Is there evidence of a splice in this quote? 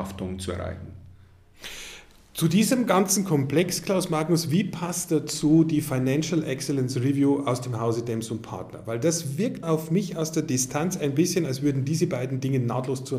yes; 1 cut; at 9.6 s

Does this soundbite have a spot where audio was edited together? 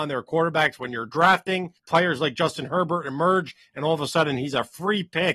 yes; 1 cut; at 1.8 s

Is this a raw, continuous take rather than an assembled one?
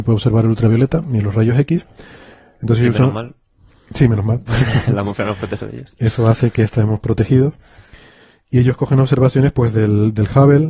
yes; 0 cuts

